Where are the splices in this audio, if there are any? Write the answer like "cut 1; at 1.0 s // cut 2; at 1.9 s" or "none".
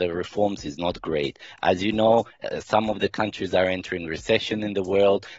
none